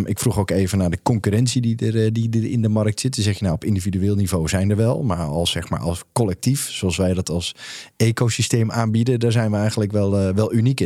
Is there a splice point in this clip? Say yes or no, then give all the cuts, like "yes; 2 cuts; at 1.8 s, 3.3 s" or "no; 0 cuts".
no; 0 cuts